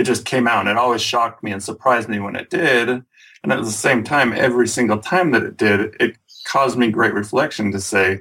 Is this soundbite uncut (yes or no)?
yes